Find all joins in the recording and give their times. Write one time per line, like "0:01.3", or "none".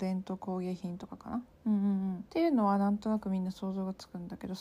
0:01.5
0:02.3